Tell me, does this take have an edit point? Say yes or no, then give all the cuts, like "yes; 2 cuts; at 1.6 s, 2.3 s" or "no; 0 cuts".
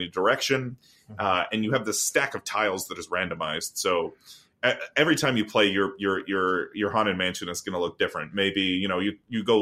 no; 0 cuts